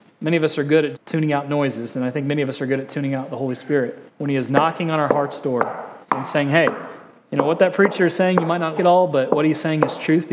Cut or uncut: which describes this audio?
cut